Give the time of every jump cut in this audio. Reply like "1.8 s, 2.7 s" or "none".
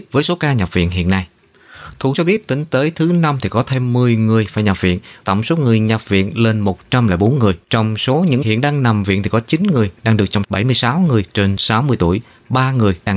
2.1 s, 5.2 s, 7.6 s, 8.4 s, 10.4 s